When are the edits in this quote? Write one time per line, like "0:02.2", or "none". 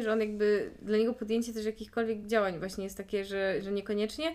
none

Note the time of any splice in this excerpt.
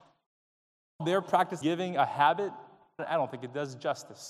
0:01.0
0:01.6
0:03.0

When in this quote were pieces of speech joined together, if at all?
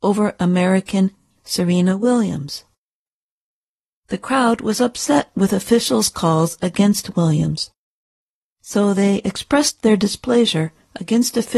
none

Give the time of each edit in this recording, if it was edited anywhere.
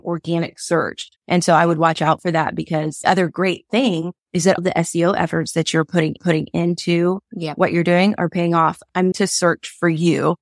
0:01.2
0:03.0
0:04.2
0:04.6
0:06.2
0:09.1

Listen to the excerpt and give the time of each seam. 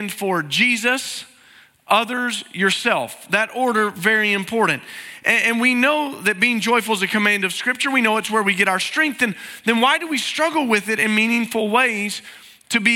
none

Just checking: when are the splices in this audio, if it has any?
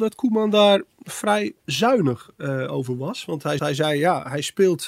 0:01.6
0:03.6

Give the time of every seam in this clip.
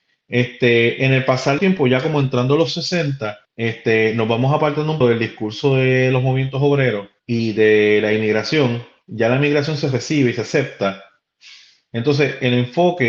0:01.6
0:03.4
0:05.0
0:07.2

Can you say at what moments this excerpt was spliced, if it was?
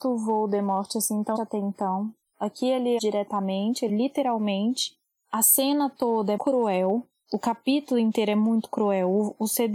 0:01.4
0:03.0
0:03.9
0:06.4

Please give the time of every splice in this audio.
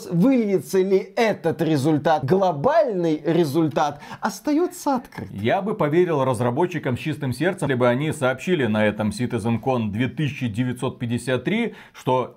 0:02.2
0:07.7

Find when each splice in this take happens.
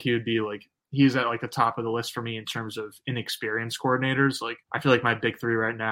0:04.6

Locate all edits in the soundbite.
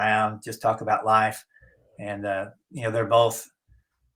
none

